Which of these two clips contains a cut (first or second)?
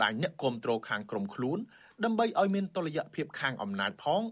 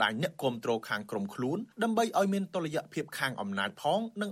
second